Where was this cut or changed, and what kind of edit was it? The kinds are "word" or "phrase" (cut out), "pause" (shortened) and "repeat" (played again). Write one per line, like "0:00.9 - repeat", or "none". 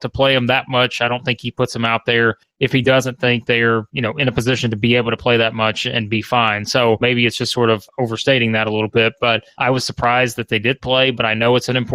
none